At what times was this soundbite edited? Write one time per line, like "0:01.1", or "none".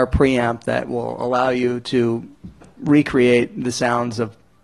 none